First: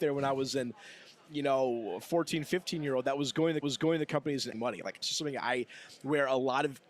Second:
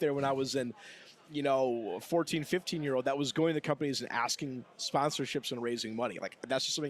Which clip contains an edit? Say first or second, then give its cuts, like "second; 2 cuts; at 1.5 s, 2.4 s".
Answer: first; 3 cuts; at 3.6 s, 4.5 s, 5.0 s